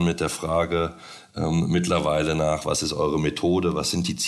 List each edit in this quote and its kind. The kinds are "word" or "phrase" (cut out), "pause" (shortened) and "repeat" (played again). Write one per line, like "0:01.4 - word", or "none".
none